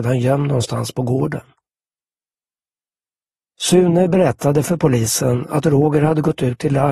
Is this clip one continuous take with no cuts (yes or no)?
yes